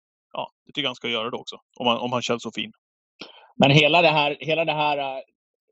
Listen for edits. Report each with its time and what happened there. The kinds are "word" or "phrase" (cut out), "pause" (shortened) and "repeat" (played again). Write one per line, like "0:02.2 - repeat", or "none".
0:01.6 - pause